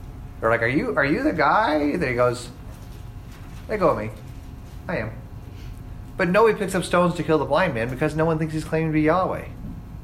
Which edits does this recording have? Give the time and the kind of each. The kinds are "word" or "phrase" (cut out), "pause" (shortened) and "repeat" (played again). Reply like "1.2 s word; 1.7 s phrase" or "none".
none

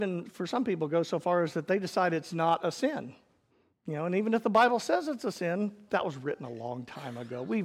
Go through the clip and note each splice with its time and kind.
3.5 s pause; 5.9 s word

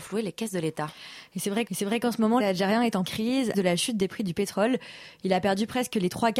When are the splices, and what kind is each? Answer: 1.7 s repeat; 2.4 s word; 3.0 s word; 3.5 s phrase

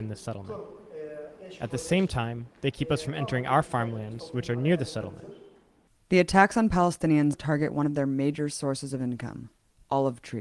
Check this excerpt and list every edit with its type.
7.3 s word

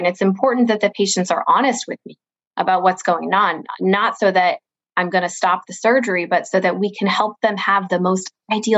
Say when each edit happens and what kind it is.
none

